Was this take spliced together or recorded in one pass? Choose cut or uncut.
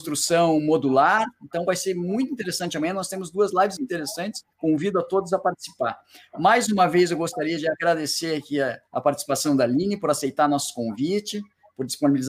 cut